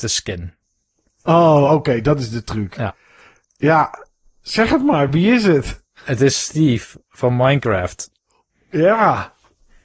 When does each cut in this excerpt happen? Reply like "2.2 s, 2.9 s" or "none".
none